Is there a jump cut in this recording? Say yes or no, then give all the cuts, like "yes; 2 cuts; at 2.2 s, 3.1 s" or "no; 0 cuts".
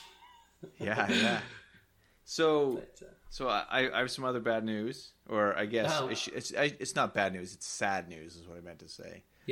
no; 0 cuts